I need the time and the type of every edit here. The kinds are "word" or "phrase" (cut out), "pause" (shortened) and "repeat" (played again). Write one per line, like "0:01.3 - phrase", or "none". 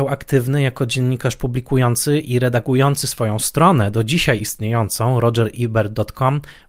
none